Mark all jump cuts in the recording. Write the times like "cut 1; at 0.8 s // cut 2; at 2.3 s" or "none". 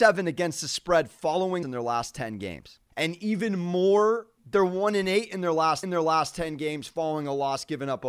cut 1; at 1.6 s // cut 2; at 2.9 s // cut 3; at 4.4 s // cut 4; at 5.8 s